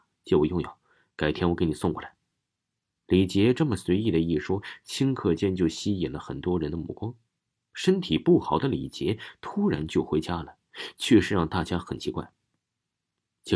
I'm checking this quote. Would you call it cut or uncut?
uncut